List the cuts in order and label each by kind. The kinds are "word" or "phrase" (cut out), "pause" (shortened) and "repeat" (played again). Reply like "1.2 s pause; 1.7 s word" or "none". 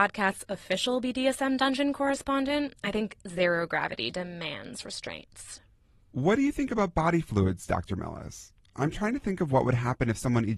none